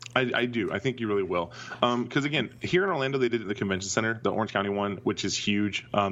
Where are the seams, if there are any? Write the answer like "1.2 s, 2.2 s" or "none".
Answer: none